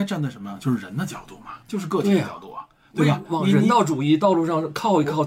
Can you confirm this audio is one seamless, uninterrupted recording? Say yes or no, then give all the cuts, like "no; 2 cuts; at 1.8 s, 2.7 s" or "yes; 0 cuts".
no; 1 cut; at 3.2 s